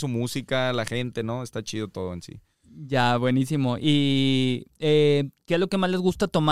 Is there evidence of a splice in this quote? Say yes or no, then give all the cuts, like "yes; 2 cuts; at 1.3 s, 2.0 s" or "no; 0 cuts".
no; 0 cuts